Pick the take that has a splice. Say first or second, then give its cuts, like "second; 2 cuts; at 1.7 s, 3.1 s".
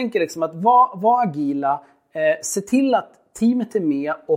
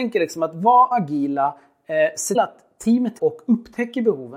second; 3 cuts; at 0.9 s, 2.3 s, 3.2 s